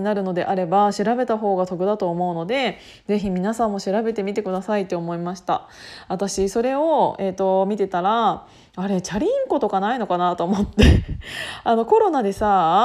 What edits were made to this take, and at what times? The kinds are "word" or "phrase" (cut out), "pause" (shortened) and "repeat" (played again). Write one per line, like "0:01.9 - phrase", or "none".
none